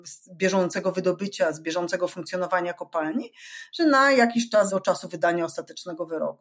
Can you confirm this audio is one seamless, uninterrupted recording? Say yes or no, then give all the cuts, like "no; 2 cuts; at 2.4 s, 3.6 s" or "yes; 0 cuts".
no; 2 cuts; at 3.8 s, 4.7 s